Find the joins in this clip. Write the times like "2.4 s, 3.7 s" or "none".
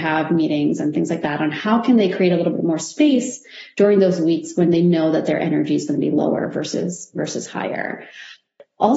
none